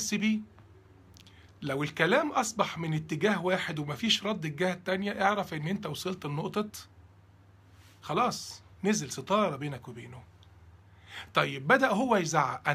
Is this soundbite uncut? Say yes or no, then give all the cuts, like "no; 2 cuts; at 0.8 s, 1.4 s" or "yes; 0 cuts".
no; 1 cut; at 8.7 s